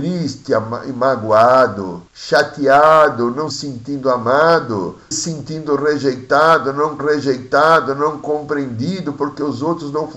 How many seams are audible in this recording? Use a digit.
4